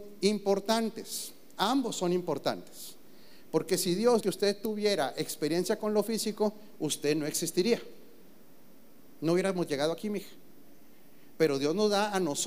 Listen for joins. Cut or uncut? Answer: cut